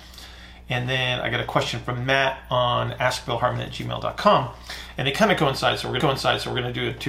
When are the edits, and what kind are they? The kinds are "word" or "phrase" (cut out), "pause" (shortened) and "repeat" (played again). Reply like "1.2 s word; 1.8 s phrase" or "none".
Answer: 6.0 s repeat